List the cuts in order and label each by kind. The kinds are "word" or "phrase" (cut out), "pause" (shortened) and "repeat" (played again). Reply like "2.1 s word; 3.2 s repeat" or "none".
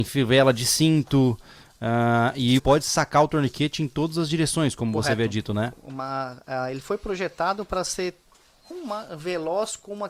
2.6 s word; 8.7 s word